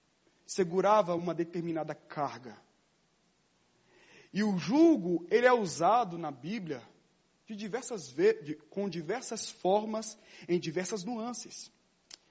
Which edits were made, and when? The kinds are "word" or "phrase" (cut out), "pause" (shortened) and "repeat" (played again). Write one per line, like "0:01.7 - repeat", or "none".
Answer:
none